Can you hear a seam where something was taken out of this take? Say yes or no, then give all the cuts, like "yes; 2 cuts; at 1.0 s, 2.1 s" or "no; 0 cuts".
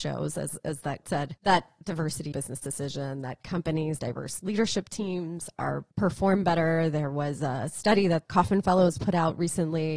yes; 6 cuts; at 1.0 s, 1.4 s, 2.3 s, 4.0 s, 5.9 s, 8.2 s